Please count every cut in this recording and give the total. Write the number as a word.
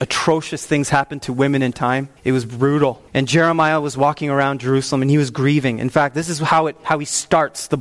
three